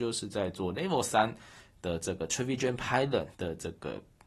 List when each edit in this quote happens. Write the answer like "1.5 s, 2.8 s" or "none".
3.3 s